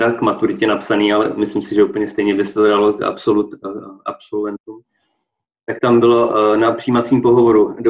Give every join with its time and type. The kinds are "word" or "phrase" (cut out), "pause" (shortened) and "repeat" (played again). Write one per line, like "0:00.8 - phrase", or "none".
none